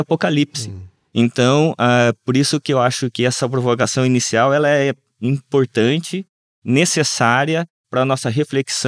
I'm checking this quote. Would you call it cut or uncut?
uncut